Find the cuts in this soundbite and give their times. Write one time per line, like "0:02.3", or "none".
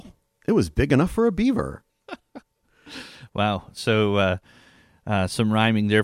0:01.9